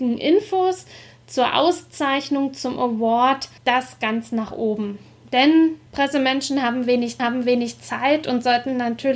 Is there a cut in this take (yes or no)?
yes